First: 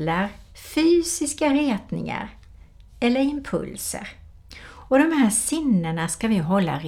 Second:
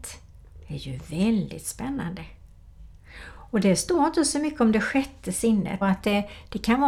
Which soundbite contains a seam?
second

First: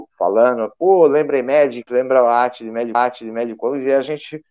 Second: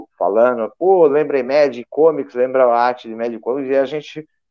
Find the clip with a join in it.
first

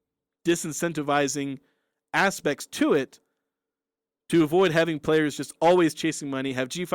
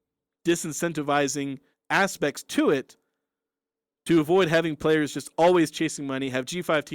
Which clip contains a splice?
second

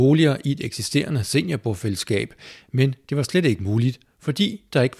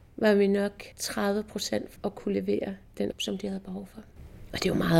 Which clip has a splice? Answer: second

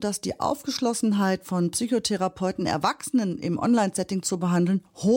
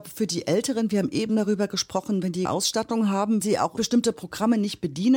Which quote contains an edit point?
second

